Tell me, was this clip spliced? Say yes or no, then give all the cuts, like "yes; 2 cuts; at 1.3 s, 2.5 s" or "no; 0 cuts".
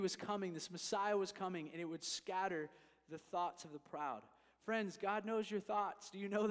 no; 0 cuts